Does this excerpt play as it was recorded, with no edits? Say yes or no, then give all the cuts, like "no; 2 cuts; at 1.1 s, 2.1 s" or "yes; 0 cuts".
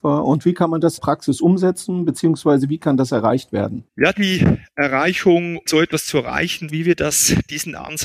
no; 4 cuts; at 1.0 s, 3.9 s, 5.7 s, 6.7 s